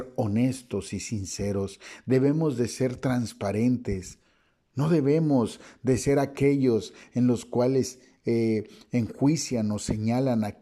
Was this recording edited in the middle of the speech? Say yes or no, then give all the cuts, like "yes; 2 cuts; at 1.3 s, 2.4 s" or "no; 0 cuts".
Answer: no; 0 cuts